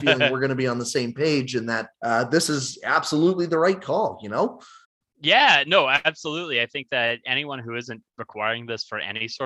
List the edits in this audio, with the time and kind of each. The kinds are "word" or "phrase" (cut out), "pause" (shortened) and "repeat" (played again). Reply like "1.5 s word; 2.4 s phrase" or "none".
1.9 s pause; 4.8 s pause